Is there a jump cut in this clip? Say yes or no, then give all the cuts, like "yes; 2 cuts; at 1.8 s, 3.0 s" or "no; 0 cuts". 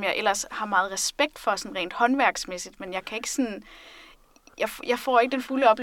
no; 0 cuts